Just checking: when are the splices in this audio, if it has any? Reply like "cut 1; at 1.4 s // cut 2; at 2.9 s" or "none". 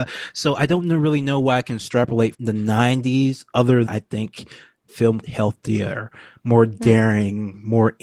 cut 1; at 2.3 s // cut 2; at 3.9 s // cut 3; at 4.9 s // cut 4; at 5.2 s